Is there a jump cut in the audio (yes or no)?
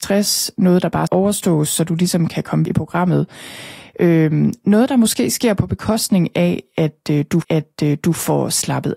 yes